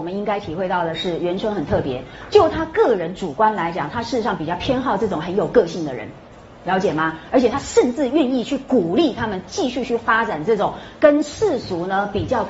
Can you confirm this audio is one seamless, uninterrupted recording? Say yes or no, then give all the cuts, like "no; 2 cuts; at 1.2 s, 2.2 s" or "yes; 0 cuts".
yes; 0 cuts